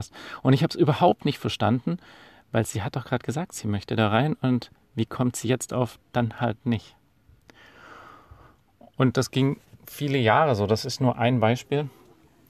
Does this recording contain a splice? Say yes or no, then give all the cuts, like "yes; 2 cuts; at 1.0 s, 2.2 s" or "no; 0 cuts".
no; 0 cuts